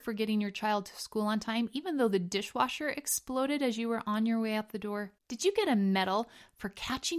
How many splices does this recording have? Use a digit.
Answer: 1